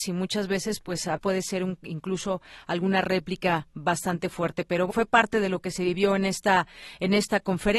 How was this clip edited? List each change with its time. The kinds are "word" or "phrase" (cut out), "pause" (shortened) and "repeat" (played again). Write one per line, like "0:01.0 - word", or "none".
0:01.2 - word
0:04.9 - word